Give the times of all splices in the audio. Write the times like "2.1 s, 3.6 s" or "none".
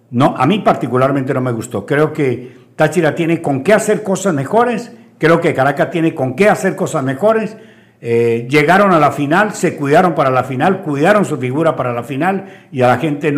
none